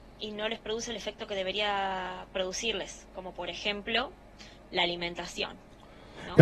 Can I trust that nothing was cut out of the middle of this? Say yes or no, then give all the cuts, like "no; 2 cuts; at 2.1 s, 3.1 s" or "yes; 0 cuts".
yes; 0 cuts